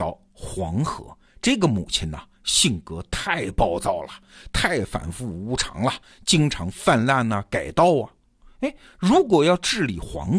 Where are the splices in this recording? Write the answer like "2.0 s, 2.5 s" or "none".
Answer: none